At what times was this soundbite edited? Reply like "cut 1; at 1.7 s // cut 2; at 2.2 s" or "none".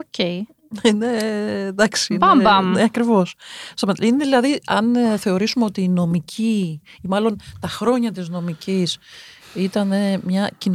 none

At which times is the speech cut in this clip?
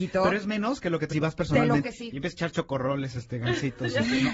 cut 1; at 1.1 s // cut 2; at 1.8 s

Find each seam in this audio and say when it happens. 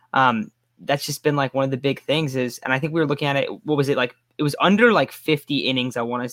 none

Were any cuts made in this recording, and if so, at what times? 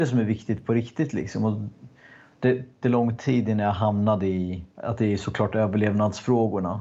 cut 1; at 2.8 s // cut 2; at 4.7 s

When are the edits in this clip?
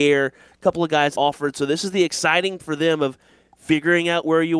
cut 1; at 1.1 s // cut 2; at 2.6 s

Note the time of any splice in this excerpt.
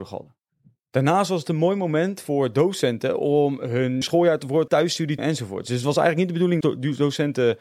cut 1; at 4.0 s // cut 2; at 4.7 s // cut 3; at 5.2 s // cut 4; at 6.6 s

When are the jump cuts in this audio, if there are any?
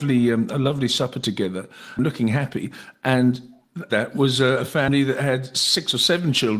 cut 1; at 2.0 s // cut 2; at 3.9 s

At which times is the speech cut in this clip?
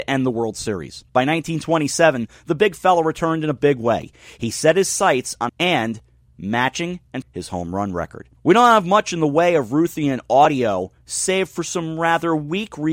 cut 1; at 1.1 s // cut 2; at 5.5 s // cut 3; at 7.2 s // cut 4; at 8.4 s

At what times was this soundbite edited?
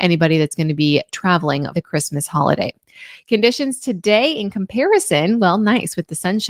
cut 1; at 1.7 s

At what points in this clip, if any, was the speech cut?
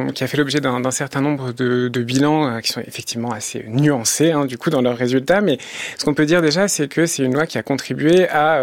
none

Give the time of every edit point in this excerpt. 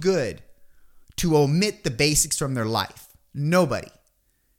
none

